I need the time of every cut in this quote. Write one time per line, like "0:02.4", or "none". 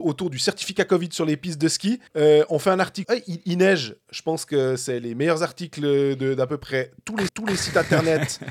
0:02.1
0:03.0
0:07.3